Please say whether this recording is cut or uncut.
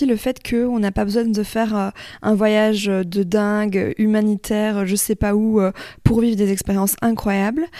uncut